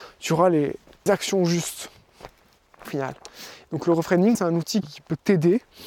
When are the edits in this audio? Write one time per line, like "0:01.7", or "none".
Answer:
0:01.1
0:02.8
0:04.3
0:04.8